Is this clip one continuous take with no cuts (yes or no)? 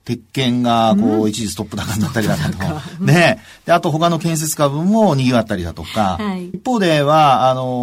no